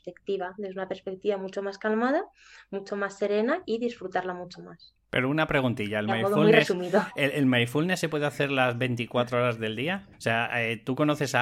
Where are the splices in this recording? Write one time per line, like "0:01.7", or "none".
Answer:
0:10.1